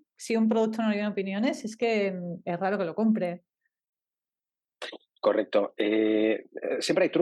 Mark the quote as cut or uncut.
uncut